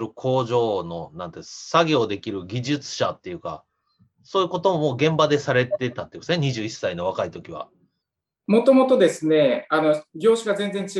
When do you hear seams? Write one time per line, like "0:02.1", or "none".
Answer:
none